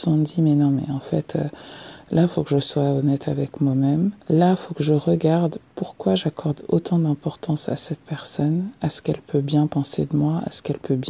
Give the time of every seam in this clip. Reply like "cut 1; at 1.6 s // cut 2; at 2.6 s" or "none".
cut 1; at 4.2 s